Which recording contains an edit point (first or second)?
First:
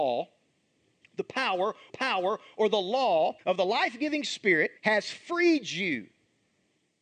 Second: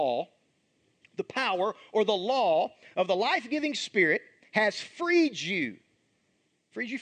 first